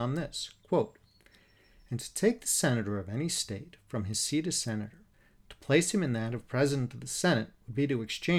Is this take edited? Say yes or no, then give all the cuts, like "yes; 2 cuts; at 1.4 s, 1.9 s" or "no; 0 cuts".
no; 0 cuts